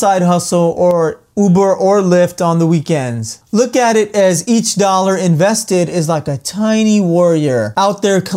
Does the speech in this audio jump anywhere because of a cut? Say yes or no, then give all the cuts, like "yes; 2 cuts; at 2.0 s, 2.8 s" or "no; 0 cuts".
no; 0 cuts